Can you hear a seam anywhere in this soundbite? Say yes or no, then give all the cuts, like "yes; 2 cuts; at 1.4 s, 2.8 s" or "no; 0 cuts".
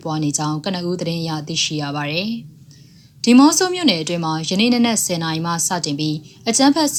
no; 0 cuts